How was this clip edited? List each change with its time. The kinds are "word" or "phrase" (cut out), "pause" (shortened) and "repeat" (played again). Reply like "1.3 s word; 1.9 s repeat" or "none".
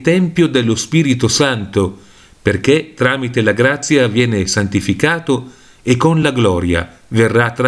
none